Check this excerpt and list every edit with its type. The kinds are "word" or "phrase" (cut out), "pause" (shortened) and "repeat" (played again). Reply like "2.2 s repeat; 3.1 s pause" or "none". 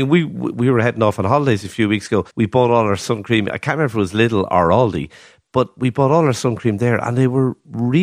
2.3 s pause